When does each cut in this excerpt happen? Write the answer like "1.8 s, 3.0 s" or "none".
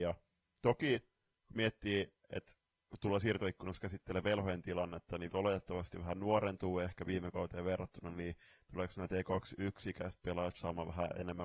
5.3 s